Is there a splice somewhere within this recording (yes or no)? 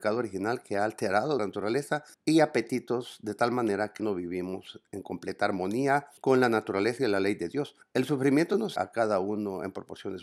yes